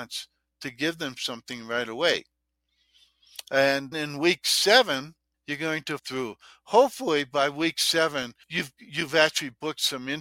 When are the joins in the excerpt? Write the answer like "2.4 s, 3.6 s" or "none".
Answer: 3.9 s, 5.3 s, 6.0 s, 8.4 s

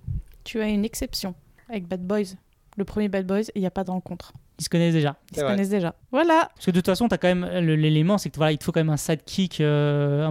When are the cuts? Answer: none

